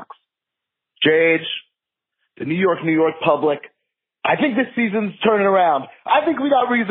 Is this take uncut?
yes; 0 cuts

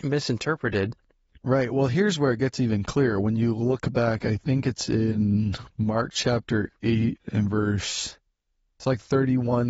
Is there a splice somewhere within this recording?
no; 0 cuts

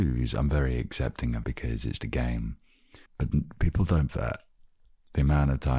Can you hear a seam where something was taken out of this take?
yes; 4 cuts; at 1.4 s, 2.0 s, 3.1 s, 4.1 s

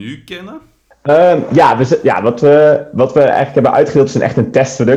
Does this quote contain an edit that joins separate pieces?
yes; 1 cut; at 0.9 s

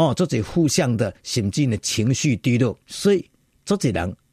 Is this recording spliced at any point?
yes; 1 cut; at 2.8 s

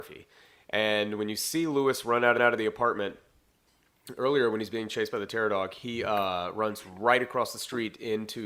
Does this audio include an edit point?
yes; 1 cut; at 2.4 s

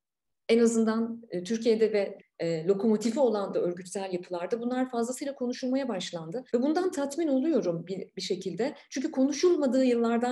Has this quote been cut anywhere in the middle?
yes; 3 cuts; at 2.2 s, 3.5 s, 6.5 s

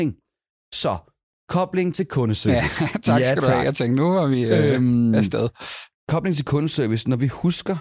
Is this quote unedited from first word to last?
no; 1 cut; at 5.9 s

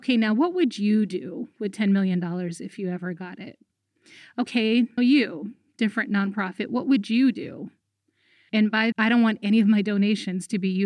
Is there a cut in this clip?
yes; 2 cuts; at 5.0 s, 8.9 s

